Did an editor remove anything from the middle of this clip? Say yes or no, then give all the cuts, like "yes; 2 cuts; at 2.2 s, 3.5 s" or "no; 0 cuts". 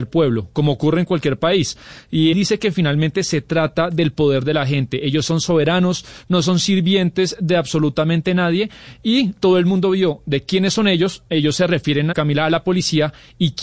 yes; 2 cuts; at 2.3 s, 12.1 s